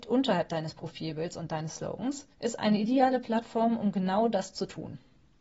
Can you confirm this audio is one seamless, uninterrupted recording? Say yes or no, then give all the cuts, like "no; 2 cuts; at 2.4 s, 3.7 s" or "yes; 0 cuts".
no; 1 cut; at 2.3 s